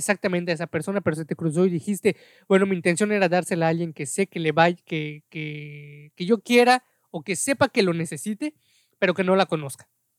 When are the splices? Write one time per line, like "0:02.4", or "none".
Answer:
none

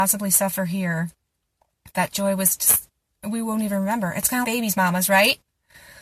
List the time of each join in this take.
0:04.4

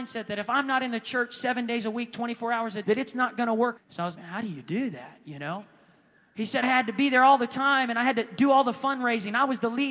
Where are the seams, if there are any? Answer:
0:02.8
0:03.8
0:04.1
0:06.6

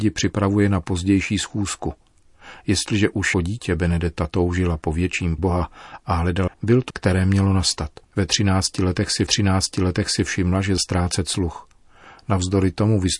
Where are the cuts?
0:03.3
0:05.4
0:06.5
0:06.9
0:08.0
0:09.3
0:10.8

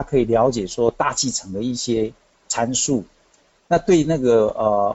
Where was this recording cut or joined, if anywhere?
none

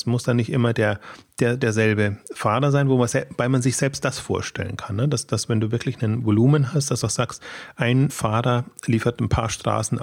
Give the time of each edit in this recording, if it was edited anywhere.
0:07.0
0:08.1

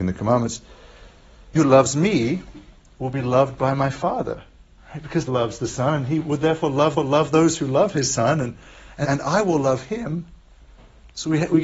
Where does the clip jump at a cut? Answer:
0:01.5
0:05.3
0:07.0
0:09.0

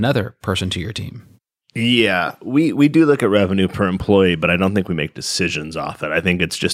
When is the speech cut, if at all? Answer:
0:01.6

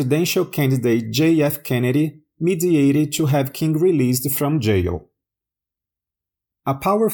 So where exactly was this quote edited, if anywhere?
none

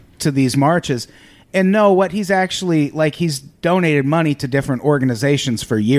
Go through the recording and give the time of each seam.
none

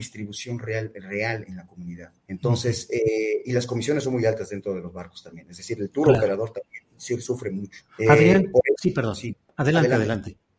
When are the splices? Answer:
0:02.2
0:07.9

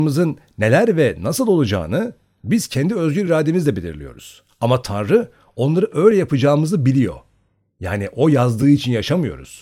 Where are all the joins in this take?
none

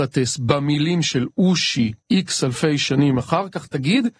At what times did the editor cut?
0:02.0

